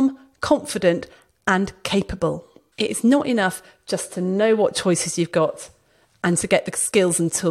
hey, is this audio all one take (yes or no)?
yes